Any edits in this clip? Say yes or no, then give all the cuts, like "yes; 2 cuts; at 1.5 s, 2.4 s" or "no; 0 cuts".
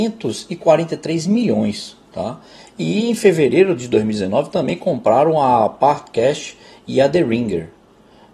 no; 0 cuts